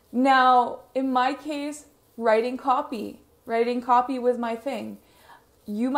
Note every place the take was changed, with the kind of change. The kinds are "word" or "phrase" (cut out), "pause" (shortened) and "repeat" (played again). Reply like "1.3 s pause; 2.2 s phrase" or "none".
none